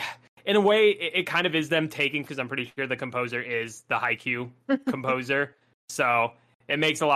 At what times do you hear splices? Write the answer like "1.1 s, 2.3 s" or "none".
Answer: 2.3 s